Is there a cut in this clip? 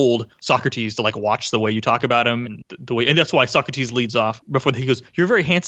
yes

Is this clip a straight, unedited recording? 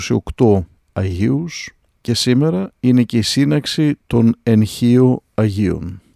yes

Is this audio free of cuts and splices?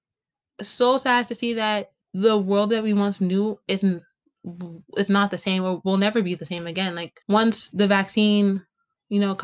no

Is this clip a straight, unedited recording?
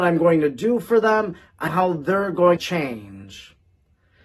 no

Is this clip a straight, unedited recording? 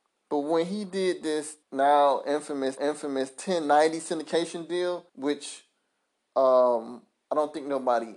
no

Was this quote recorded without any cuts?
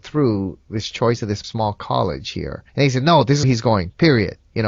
no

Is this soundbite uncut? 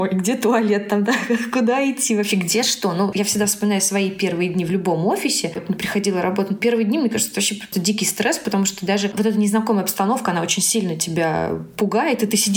no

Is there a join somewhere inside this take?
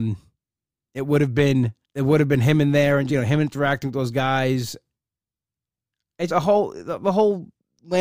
yes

